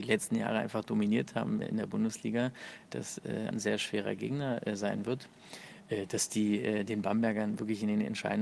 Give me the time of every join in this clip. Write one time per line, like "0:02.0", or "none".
0:01.6
0:03.5